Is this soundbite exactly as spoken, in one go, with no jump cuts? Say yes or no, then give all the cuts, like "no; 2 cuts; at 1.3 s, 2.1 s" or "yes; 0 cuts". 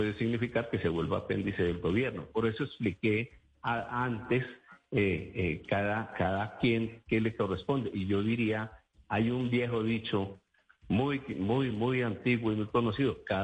yes; 0 cuts